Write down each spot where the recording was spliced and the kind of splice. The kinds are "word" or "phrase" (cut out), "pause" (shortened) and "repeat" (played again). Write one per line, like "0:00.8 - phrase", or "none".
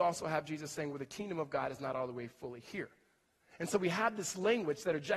none